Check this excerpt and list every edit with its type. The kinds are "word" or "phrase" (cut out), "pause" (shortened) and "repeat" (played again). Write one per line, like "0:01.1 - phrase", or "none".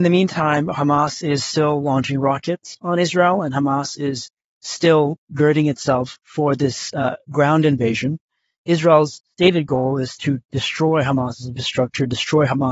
none